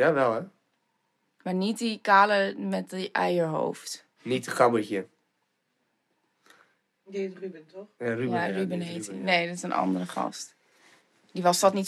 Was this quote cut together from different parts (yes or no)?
no